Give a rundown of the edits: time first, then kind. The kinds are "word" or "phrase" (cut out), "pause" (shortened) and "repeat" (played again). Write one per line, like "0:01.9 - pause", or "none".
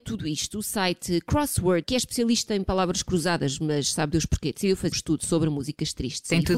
0:01.8 - word
0:04.9 - word